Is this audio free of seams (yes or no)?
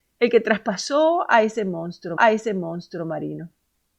no